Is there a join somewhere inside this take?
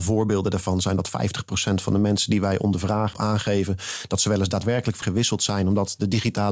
yes; 2 cuts; at 3.1 s, 5.0 s

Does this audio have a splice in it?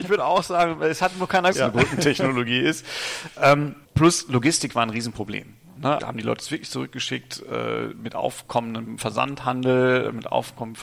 yes; 3 cuts; at 1.5 s, 3.8 s, 6.0 s

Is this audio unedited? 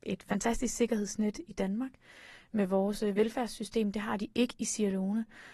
yes; 0 cuts

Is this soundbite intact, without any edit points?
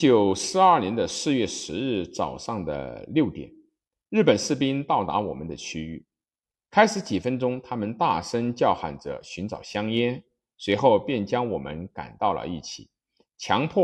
yes; 0 cuts

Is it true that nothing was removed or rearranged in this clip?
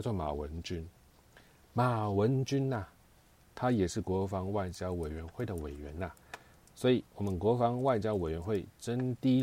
yes; 0 cuts

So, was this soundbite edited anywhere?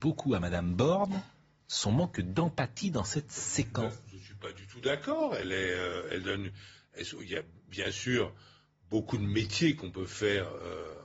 no; 0 cuts

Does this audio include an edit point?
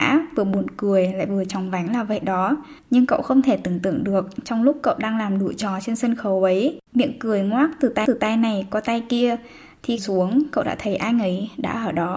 yes; 4 cuts; at 2.8 s, 6.9 s, 8.1 s, 10.0 s

